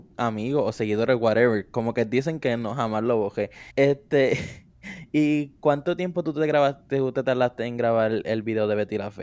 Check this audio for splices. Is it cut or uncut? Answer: cut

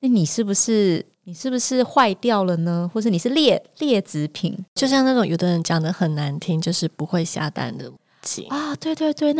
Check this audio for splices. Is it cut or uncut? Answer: cut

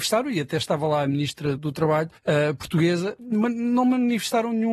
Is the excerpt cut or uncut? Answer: cut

